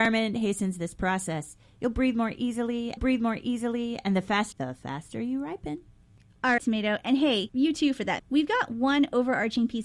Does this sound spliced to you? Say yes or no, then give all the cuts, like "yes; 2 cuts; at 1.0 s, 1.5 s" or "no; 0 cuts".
yes; 5 cuts; at 3.0 s, 4.5 s, 6.6 s, 7.5 s, 8.2 s